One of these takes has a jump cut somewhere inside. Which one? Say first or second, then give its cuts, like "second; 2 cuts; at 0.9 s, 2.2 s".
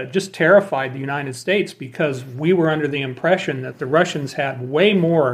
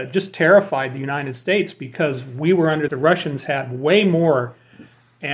second; 1 cut; at 2.9 s